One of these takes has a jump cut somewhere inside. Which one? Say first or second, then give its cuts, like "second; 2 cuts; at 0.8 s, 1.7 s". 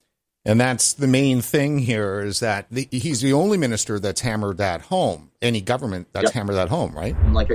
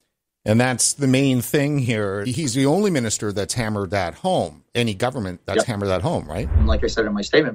second; 1 cut; at 2.2 s